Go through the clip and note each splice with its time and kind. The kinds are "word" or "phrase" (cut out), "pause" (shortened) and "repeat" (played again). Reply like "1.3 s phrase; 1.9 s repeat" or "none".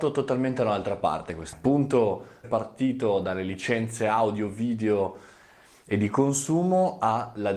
1.5 s word; 2.4 s word